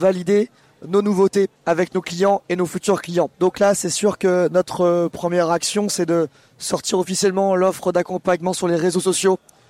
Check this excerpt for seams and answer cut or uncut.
cut